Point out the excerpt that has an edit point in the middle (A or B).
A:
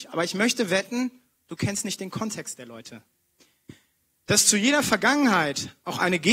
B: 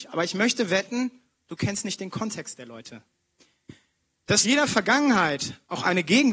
B